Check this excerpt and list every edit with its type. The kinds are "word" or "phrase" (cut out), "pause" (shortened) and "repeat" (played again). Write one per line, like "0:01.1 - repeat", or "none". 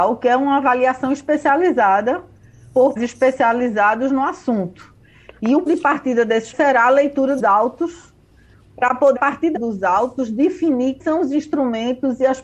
0:03.0 - word
0:05.7 - word
0:06.5 - word
0:07.4 - word
0:09.2 - word
0:09.6 - word
0:11.0 - word